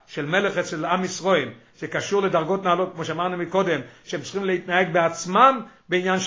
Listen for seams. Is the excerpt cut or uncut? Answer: uncut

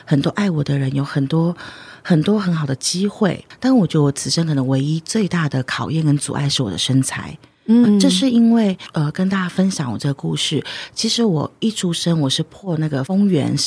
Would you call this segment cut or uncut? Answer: cut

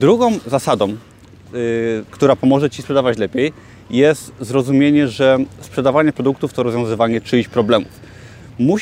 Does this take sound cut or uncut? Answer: uncut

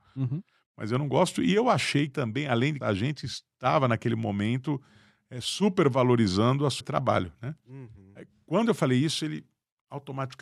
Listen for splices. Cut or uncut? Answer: cut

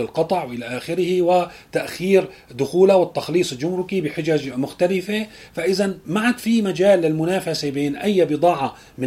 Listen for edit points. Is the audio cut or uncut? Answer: uncut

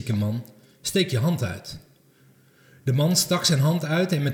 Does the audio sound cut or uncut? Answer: uncut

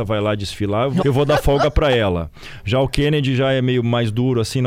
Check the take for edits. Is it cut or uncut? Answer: cut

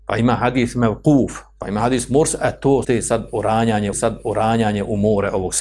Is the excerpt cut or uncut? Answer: cut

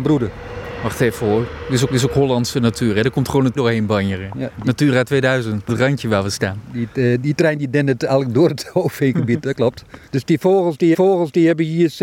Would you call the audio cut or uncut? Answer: cut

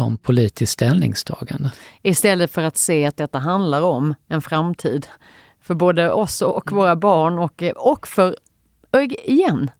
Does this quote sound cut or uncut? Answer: uncut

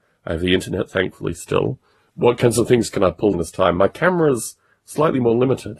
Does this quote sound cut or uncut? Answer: cut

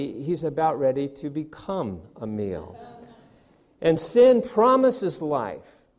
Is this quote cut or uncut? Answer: uncut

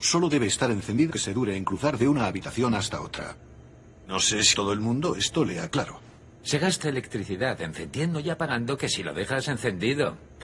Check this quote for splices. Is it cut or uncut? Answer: cut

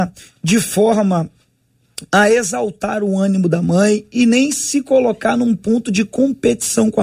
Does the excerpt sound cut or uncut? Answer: uncut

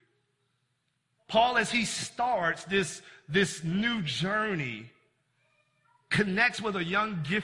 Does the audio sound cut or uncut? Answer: uncut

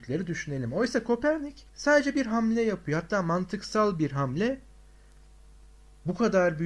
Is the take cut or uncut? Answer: cut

